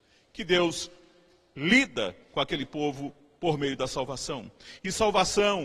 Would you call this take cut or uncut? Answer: uncut